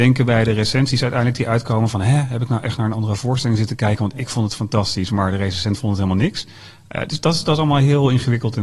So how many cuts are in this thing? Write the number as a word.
zero